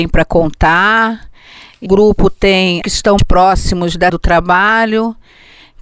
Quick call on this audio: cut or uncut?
cut